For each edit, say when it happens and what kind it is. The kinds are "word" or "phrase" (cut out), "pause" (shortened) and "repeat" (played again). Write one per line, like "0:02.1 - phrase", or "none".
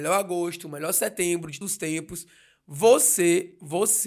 0:01.6 - word